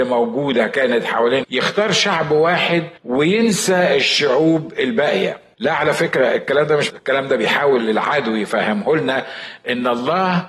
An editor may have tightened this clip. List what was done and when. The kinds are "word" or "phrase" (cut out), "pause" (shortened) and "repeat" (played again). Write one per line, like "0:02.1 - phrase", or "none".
0:01.4 - word
0:03.0 - pause
0:05.5 - pause
0:06.9 - word